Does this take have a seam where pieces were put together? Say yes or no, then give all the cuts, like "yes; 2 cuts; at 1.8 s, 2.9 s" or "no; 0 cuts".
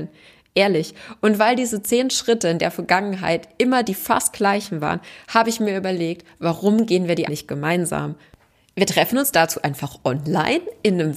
yes; 1 cut; at 7.2 s